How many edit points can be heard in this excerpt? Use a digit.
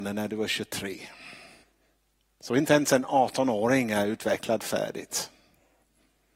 1